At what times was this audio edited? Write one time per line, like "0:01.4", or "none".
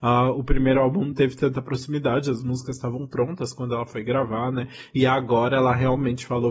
0:01.1